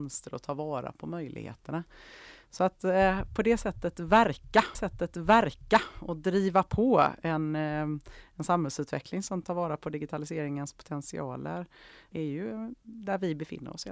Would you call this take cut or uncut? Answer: cut